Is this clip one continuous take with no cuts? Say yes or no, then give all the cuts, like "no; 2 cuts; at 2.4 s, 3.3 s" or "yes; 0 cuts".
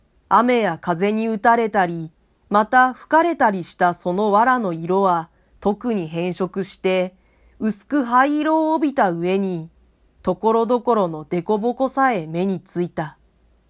yes; 0 cuts